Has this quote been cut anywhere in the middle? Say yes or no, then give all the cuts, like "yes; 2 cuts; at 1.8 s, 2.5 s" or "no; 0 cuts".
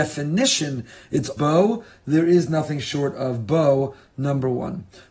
yes; 1 cut; at 1.4 s